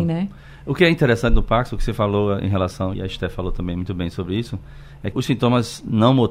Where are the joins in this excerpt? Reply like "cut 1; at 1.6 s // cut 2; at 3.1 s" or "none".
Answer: cut 1; at 2.9 s // cut 2; at 5.1 s

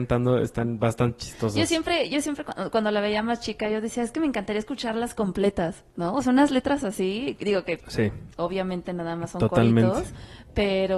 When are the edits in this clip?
cut 1; at 5.9 s // cut 2; at 7.8 s

